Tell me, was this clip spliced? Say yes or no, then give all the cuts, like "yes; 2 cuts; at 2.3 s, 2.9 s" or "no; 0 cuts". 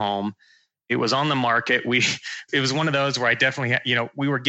no; 0 cuts